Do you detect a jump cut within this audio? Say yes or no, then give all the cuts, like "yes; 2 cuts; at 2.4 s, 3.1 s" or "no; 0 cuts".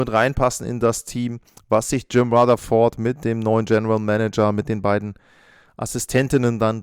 no; 0 cuts